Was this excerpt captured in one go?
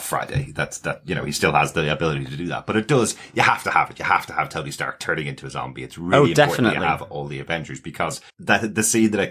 no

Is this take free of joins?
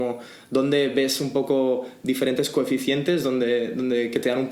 yes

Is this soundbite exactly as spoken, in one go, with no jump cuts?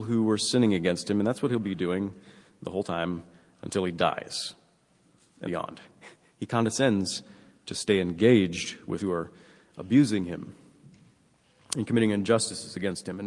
no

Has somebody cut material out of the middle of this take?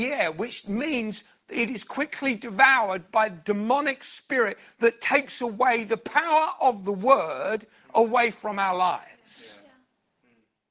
no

